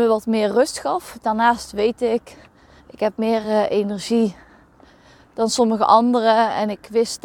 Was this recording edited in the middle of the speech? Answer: no; 0 cuts

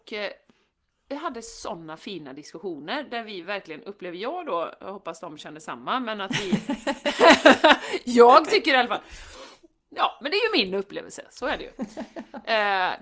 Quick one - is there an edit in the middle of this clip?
no; 0 cuts

